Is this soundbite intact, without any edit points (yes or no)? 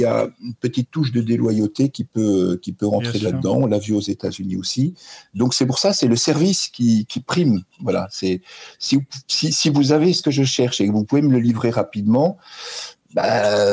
yes